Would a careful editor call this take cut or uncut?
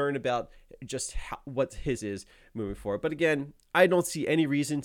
cut